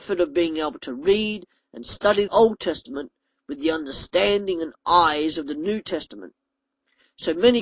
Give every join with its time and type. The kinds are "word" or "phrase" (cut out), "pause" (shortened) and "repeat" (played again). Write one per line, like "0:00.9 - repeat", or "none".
0:02.3 - word